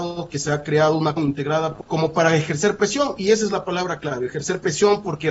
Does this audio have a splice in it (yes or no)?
yes